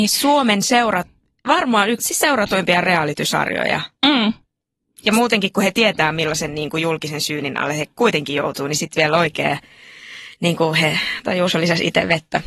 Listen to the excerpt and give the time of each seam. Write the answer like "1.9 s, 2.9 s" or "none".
2.0 s